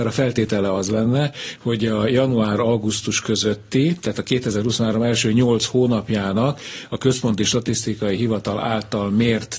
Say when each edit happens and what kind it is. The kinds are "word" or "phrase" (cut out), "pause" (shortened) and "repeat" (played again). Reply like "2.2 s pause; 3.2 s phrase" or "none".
none